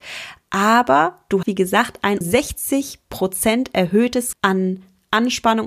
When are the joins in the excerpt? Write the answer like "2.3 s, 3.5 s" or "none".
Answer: 1.4 s, 2.2 s, 4.3 s

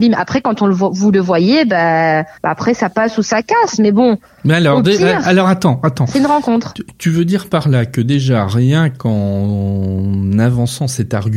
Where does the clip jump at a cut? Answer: 2.4 s

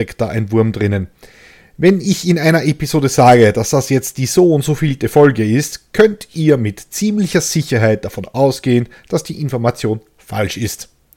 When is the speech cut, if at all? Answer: none

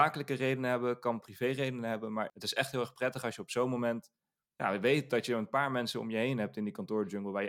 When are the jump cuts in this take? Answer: none

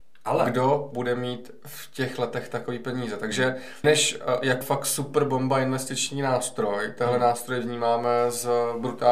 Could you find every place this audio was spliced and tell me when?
3.8 s, 4.6 s

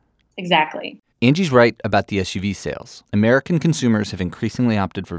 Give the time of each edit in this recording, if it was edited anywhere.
1.1 s, 3.1 s

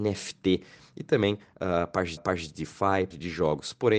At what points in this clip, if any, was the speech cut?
2.2 s, 3.1 s

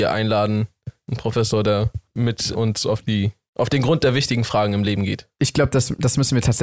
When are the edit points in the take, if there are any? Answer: 2.5 s

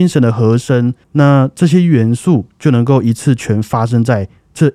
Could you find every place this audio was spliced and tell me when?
1.0 s

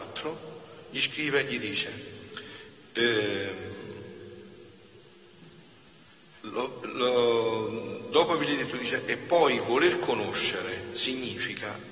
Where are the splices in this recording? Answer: none

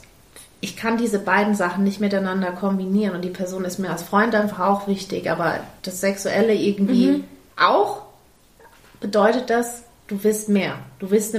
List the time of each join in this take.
5.8 s, 7.5 s

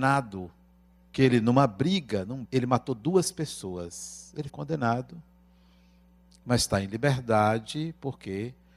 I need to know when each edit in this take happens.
1.1 s, 2.4 s, 4.5 s

